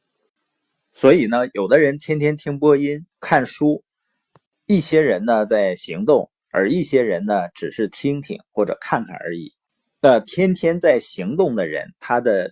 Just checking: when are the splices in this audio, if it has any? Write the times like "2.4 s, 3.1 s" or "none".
3.1 s, 9.7 s

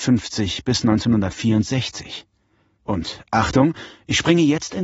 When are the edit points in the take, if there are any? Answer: none

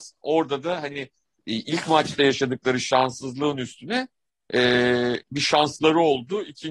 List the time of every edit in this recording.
none

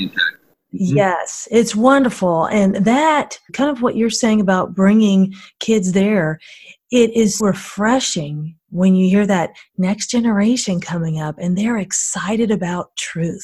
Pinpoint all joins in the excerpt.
3.5 s, 7.4 s

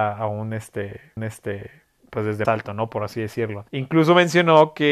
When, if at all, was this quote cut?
1.2 s, 2.4 s, 3.7 s

